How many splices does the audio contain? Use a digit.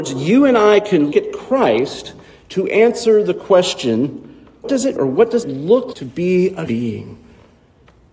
6